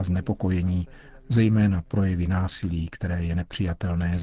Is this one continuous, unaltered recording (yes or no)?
yes